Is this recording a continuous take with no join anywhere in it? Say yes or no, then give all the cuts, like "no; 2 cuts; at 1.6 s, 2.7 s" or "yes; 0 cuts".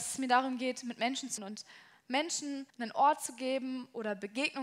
no; 2 cuts; at 1.4 s, 2.7 s